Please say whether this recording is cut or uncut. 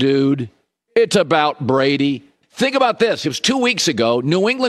uncut